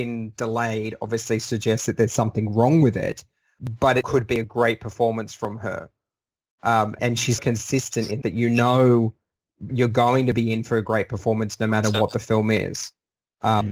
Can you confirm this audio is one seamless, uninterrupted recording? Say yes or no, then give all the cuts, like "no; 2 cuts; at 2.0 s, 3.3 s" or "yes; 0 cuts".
no; 5 cuts; at 4.0 s, 7.0 s, 7.4 s, 8.2 s, 9.7 s